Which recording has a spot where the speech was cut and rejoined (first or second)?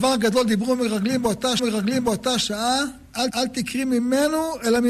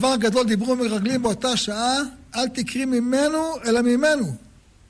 first